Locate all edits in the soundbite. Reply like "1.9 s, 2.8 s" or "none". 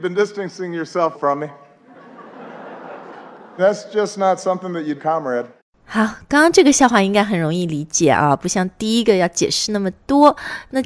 1.1 s, 3.6 s, 5.0 s, 5.6 s